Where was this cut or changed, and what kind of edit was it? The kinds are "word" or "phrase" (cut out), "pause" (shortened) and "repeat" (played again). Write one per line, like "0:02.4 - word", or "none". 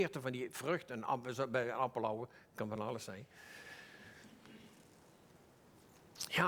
none